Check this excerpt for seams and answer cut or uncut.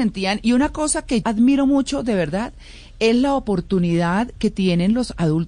cut